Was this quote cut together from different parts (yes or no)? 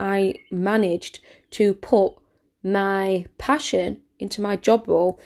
no